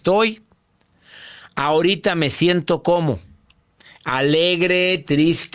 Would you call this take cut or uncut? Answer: uncut